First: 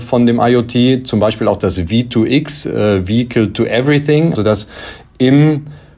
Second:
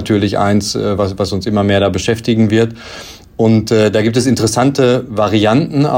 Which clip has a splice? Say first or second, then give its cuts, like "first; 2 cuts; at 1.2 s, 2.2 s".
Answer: first; 1 cut; at 4.3 s